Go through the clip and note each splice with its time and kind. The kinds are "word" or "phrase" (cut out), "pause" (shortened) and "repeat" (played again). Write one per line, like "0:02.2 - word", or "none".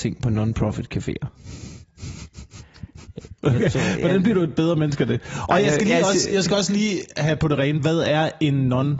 0:03.4 - pause